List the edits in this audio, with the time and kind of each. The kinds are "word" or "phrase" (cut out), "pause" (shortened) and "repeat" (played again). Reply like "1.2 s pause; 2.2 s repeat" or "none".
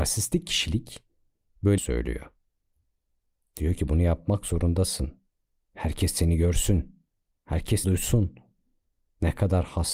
1.8 s word; 7.8 s word